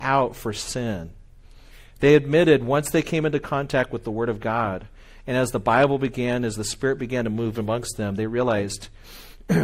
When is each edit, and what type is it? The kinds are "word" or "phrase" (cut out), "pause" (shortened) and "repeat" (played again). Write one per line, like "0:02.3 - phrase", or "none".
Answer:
none

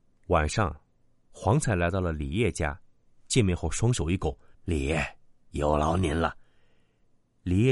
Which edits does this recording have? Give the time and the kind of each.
0:04.5 - pause

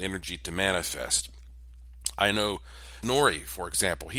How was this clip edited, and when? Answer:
0:03.0 - word

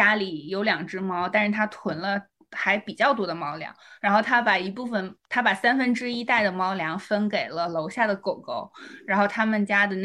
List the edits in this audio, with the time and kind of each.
none

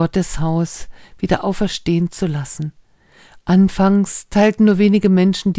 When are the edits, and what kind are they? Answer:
none

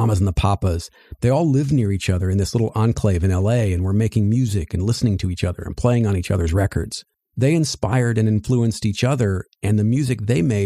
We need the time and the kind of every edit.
0:07.1 - pause

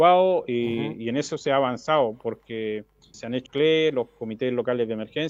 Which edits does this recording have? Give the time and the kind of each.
0:03.1 - word
0:03.5 - word

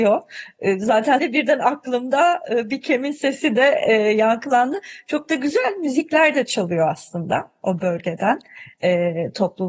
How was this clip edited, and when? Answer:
0:01.2 - phrase

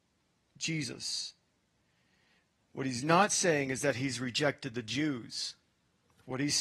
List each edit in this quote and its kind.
none

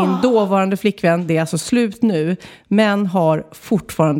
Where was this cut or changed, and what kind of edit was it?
none

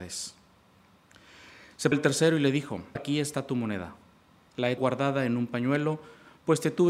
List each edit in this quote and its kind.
0:01.9 - word
0:03.0 - word
0:04.8 - word

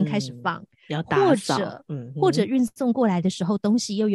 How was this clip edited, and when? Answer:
none

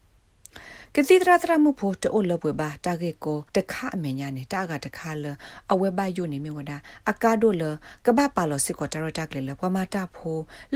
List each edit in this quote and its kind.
0:03.5 - pause

